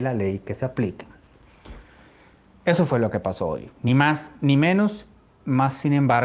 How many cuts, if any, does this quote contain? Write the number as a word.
zero